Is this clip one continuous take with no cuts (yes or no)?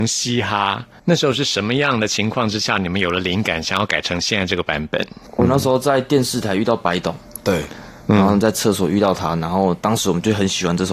yes